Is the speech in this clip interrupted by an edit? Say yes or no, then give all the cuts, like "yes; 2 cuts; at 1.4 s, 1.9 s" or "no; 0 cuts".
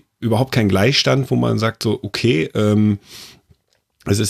no; 0 cuts